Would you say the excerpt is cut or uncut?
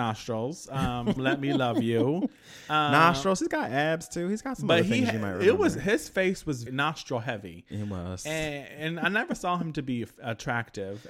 cut